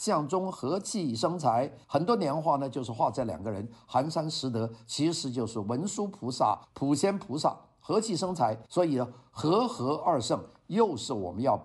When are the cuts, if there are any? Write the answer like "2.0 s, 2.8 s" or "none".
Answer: 1.8 s, 6.6 s, 8.7 s